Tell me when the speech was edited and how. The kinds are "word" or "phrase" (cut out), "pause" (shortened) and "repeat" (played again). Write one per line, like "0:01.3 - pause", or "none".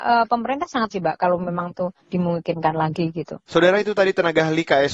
0:00.9 - word
0:01.7 - word
0:02.0 - pause